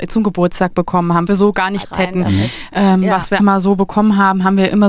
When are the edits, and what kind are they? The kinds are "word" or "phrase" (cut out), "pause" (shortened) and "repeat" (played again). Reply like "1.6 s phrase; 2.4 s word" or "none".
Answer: 1.3 s word; 1.8 s word; 3.4 s word